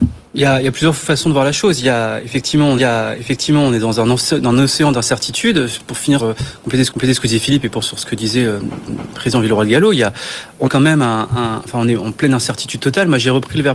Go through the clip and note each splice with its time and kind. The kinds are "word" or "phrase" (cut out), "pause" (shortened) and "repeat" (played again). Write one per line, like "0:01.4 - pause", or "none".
0:02.8 - repeat
0:06.2 - word
0:06.9 - repeat
0:07.8 - word
0:08.9 - repeat
0:10.7 - word